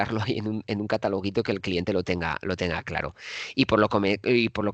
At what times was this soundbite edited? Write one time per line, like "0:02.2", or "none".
none